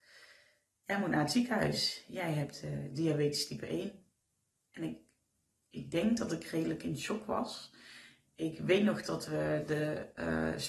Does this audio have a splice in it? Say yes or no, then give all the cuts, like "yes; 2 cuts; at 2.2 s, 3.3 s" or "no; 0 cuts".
no; 0 cuts